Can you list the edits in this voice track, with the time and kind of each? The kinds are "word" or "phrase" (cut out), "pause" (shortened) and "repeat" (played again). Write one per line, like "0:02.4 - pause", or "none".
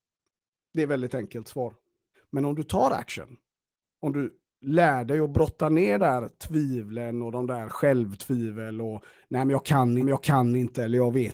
0:02.1 - pause
0:06.0 - word
0:10.0 - repeat

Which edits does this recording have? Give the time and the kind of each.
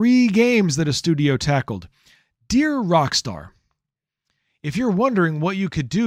none

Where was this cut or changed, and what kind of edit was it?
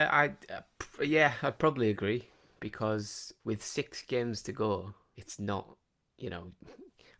0:03.4 - pause
0:05.1 - word

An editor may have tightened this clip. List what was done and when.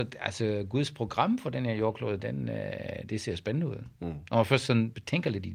none

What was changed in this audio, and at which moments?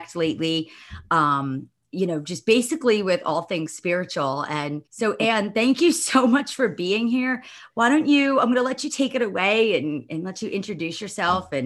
0:04.9 - pause

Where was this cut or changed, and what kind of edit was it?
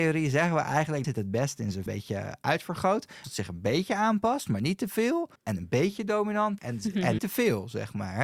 0:01.0 - phrase
0:01.9 - phrase
0:03.2 - word
0:05.4 - pause
0:06.6 - word
0:07.2 - word

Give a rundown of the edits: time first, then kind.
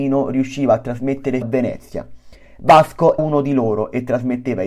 0:01.4 - word
0:03.2 - word

